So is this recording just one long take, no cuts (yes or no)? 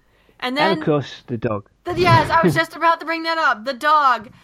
yes